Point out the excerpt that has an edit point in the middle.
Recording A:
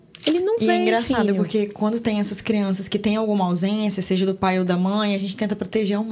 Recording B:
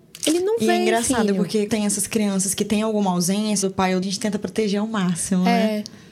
B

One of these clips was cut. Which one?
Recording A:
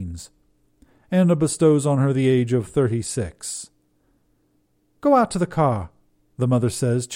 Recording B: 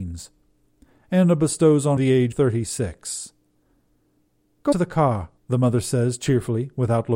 B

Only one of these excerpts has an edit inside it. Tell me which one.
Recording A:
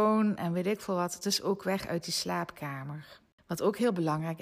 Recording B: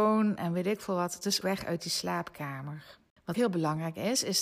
B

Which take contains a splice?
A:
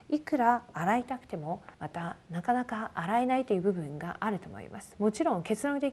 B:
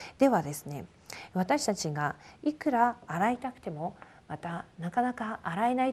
A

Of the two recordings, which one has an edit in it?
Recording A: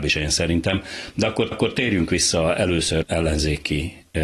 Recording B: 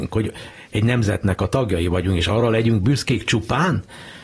A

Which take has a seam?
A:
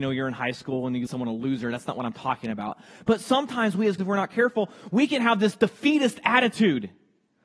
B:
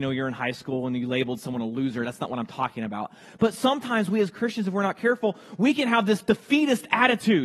A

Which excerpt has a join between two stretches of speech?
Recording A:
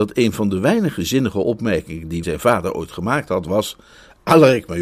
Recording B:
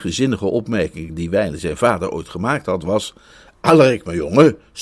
A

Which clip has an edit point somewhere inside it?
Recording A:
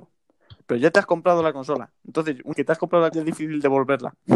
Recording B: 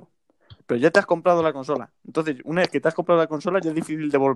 A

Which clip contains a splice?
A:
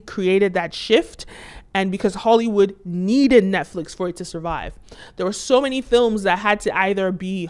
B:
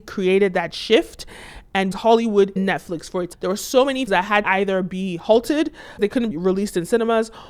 B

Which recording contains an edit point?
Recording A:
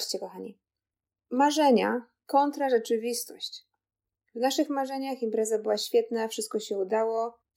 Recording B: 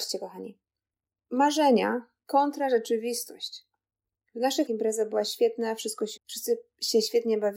B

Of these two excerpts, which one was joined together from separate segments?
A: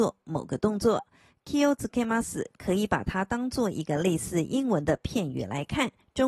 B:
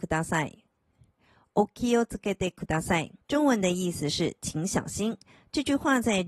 B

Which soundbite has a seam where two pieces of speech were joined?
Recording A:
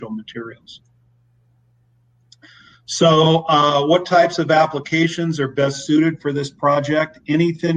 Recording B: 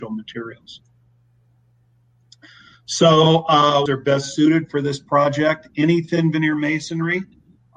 B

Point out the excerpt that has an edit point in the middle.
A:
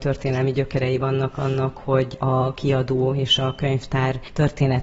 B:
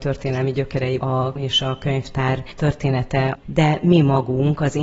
B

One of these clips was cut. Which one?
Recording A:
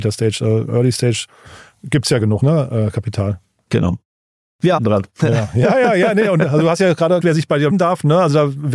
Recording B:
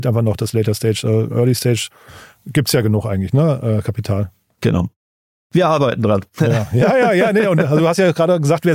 A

